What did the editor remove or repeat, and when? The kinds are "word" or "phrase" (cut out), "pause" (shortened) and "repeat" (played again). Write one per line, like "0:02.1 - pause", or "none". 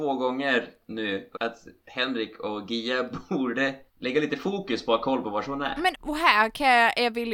0:01.3 - phrase
0:03.9 - pause
0:05.9 - word